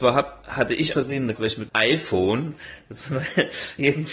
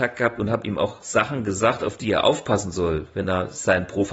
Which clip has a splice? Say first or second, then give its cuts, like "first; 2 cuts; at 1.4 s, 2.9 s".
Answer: first; 3 cuts; at 0.9 s, 1.3 s, 1.7 s